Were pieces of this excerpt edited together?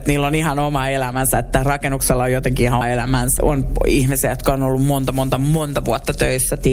yes; 2 cuts; at 2.8 s, 3.4 s

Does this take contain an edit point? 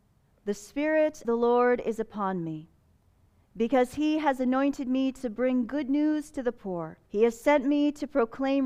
yes; 2 cuts; at 1.2 s, 7.1 s

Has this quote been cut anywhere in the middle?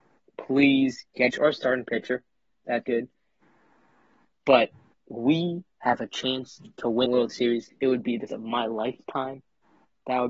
yes; 5 cuts; at 1.3 s, 2.8 s, 4.9 s, 7.1 s, 8.3 s

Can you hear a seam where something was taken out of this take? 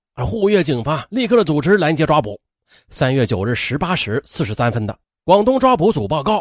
no; 0 cuts

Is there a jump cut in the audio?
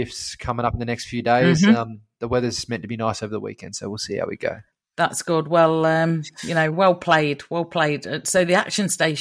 no; 0 cuts

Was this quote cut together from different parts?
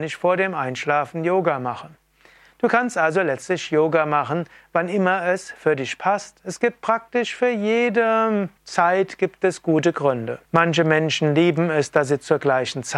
yes; 2 cuts; at 8.6 s, 10.4 s

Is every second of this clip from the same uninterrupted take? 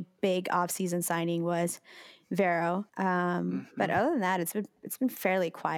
no; 1 cut; at 2.9 s

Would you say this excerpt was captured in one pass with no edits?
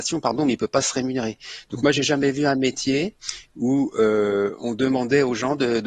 yes; 0 cuts

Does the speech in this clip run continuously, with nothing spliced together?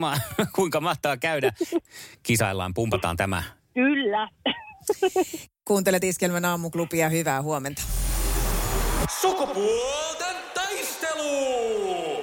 yes; 0 cuts

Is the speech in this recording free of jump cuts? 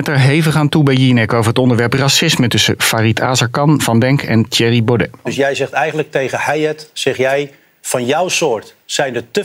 yes; 0 cuts

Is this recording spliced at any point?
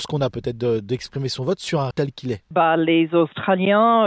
yes; 1 cut; at 1.9 s

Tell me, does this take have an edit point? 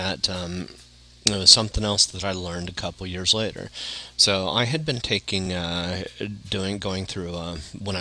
no; 0 cuts

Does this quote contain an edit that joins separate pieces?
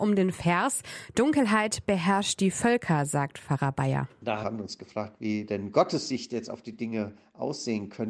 no; 0 cuts

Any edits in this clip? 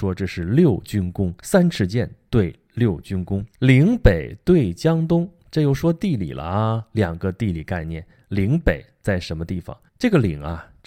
yes; 3 cuts; at 1.4 s, 3.5 s, 9.9 s

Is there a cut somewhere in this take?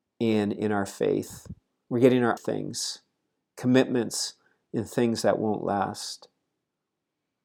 yes; 1 cut; at 2.4 s

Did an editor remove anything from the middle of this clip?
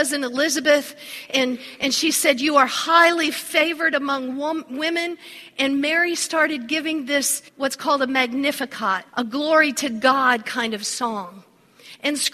yes; 2 cuts; at 7.5 s, 9.1 s

